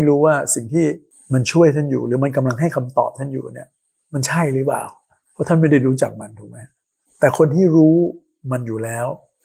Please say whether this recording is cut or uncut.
uncut